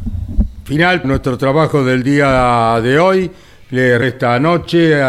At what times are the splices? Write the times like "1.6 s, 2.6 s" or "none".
1.0 s, 4.0 s